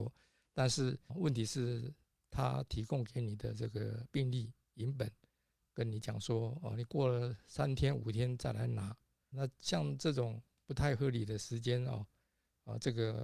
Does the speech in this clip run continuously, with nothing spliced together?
no; 2 cuts; at 1.1 s, 9.3 s

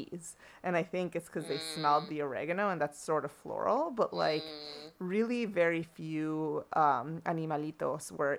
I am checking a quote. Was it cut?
no; 0 cuts

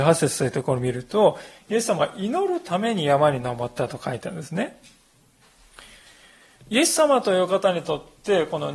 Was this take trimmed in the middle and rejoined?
no; 0 cuts

